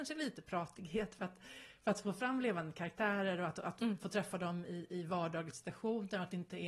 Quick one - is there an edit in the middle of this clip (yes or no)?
no